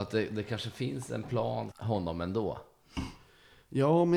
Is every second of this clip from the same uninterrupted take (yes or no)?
no